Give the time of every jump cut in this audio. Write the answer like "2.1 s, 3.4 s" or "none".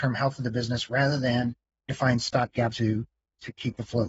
1.9 s, 2.7 s